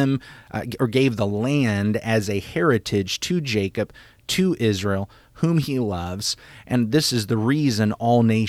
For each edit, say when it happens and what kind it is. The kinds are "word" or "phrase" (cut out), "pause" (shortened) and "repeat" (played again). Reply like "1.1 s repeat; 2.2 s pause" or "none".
none